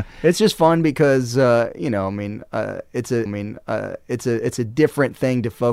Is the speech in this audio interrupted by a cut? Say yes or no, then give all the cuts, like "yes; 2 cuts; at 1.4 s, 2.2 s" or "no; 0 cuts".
yes; 1 cut; at 3.3 s